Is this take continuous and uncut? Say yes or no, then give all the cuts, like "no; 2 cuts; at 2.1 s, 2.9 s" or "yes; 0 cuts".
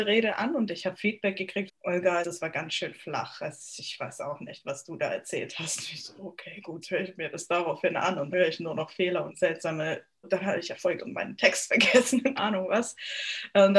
no; 8 cuts; at 1.7 s, 2.2 s, 6.8 s, 8.3 s, 9.3 s, 10.2 s, 11.0 s, 12.4 s